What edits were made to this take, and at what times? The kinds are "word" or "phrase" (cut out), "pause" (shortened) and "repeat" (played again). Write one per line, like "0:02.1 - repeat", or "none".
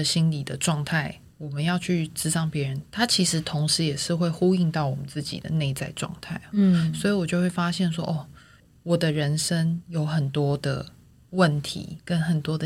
none